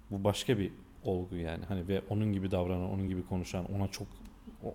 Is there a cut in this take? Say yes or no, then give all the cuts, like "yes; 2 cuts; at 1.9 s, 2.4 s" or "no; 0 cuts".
no; 0 cuts